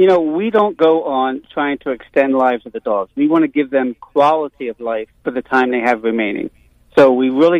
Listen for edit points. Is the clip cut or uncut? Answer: cut